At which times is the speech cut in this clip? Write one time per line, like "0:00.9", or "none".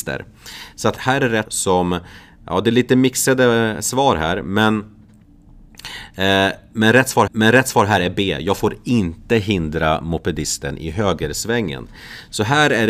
0:01.0
0:01.5
0:07.3